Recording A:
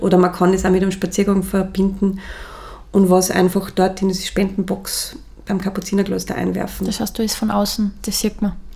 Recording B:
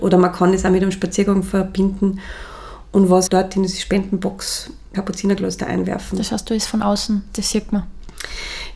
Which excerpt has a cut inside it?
B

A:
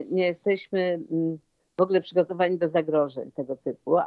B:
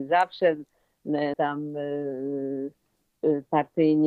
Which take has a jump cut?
B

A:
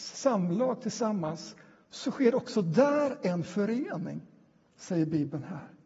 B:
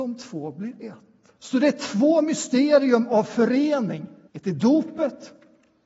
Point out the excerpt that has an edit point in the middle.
B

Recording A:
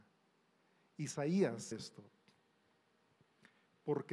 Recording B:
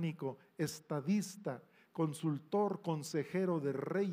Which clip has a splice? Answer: A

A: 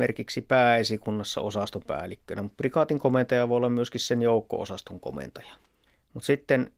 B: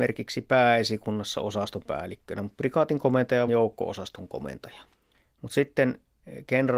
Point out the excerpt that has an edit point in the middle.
B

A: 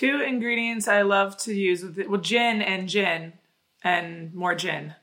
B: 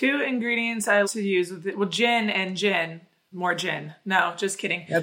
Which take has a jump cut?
B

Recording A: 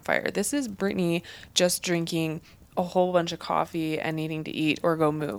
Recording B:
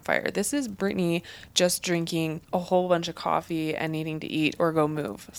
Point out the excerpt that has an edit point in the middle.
B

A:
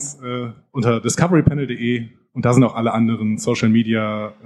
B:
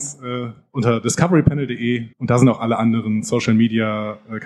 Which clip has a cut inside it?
B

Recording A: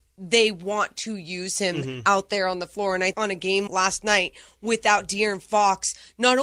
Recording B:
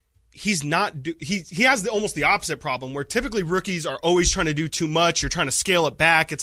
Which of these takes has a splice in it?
A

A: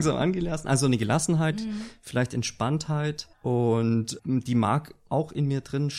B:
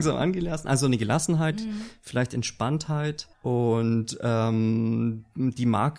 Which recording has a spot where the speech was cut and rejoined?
A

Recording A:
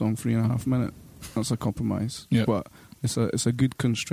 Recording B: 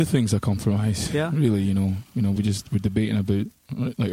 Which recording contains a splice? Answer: A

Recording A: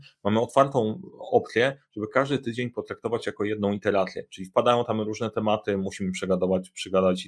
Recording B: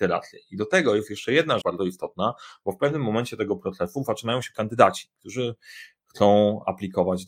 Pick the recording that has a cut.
B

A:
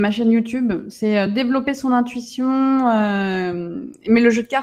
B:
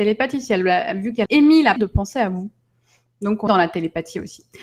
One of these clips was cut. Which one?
B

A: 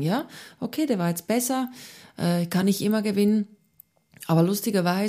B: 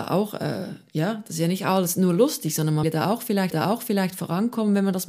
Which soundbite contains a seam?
B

